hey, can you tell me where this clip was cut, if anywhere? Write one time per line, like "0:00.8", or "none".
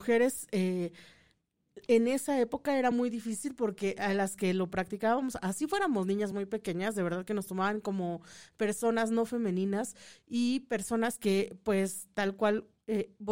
none